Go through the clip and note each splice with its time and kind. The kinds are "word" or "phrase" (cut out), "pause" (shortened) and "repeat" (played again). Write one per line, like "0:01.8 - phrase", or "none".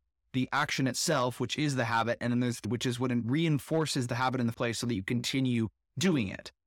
0:02.6 - word
0:04.5 - word